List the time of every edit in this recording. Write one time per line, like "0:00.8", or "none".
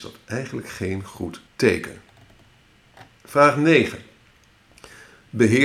0:01.5